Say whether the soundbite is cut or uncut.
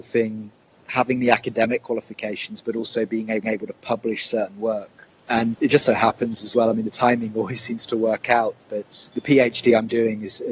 cut